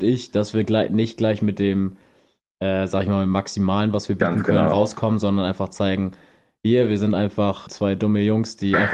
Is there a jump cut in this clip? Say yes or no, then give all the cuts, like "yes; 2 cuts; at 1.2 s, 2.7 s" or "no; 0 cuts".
yes; 1 cut; at 7.7 s